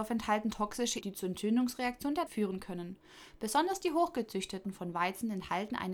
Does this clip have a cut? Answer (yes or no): yes